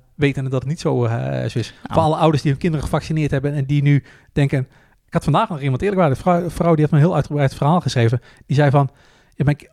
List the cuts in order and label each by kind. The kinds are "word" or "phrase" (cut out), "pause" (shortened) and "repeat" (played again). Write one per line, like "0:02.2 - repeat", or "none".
0:01.8 - pause